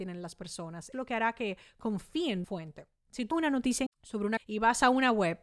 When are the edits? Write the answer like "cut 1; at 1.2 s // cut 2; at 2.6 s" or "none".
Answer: cut 1; at 0.9 s // cut 2; at 2.4 s // cut 3; at 3.3 s // cut 4; at 3.9 s // cut 5; at 4.4 s